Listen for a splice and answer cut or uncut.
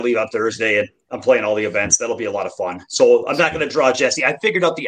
uncut